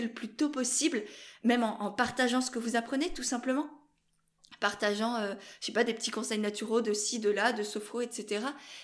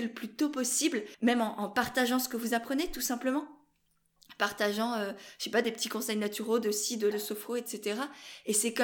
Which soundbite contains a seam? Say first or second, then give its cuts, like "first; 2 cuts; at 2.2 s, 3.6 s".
second; 2 cuts; at 1.1 s, 7.1 s